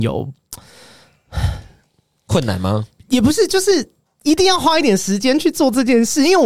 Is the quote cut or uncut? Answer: uncut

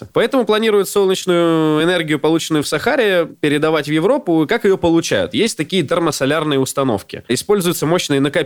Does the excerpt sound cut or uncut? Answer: uncut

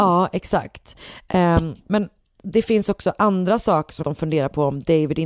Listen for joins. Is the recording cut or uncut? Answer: cut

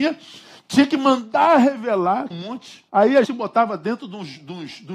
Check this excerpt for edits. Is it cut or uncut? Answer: cut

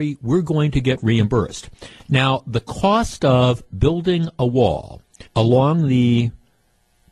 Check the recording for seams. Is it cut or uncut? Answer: cut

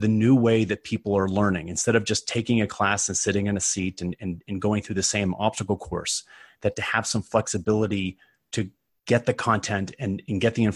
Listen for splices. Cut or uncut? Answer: uncut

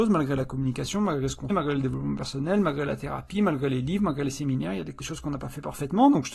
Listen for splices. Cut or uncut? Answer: cut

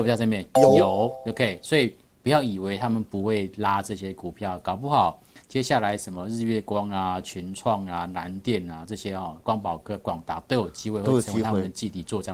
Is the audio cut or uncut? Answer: uncut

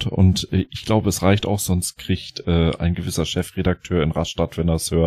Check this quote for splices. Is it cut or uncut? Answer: uncut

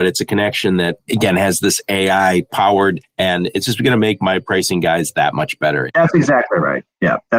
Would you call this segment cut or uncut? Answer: uncut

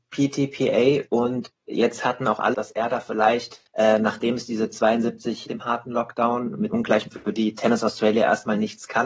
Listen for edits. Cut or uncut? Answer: cut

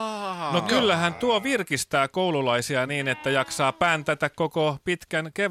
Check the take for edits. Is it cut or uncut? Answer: uncut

